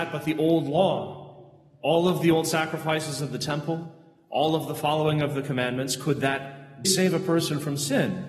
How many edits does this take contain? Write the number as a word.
one